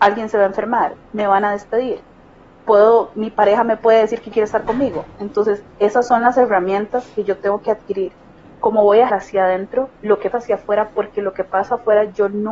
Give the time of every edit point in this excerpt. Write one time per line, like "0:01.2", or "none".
0:01.0
0:04.3
0:09.1
0:09.9
0:10.3